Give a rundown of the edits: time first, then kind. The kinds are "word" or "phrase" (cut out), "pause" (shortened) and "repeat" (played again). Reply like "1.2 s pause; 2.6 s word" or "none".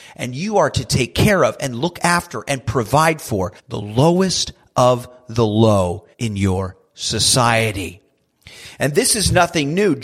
3.6 s pause; 6.1 s pause